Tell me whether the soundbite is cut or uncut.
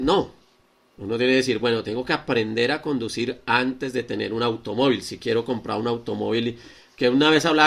uncut